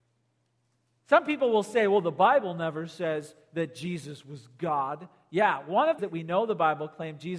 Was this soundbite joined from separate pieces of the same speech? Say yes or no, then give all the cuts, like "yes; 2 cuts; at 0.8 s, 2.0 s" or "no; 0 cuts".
yes; 1 cut; at 6.0 s